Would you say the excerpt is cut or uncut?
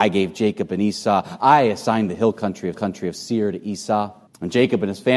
cut